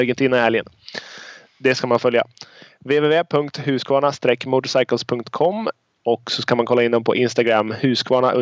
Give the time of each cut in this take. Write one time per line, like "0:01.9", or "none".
none